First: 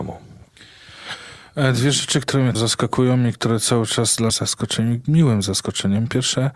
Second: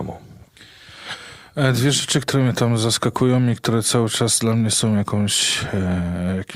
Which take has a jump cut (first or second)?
first